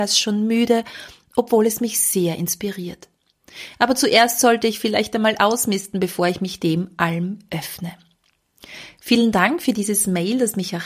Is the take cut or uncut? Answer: uncut